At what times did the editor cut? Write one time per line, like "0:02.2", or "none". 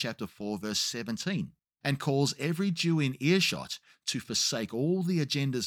0:01.6